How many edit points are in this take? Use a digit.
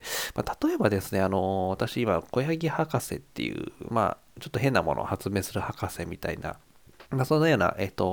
1